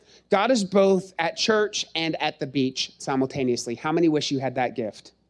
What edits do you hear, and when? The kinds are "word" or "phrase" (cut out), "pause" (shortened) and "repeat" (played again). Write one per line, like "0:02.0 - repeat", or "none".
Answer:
none